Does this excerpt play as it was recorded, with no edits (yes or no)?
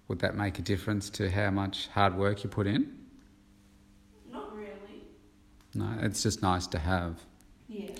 yes